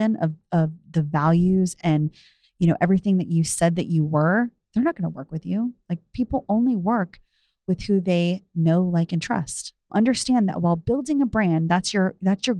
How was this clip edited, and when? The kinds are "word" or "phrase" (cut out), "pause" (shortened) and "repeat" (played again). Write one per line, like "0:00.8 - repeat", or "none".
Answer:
0:09.9 - word